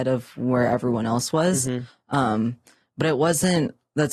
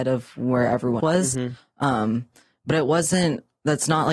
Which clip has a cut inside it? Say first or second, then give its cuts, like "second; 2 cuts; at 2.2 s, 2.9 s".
second; 1 cut; at 1.0 s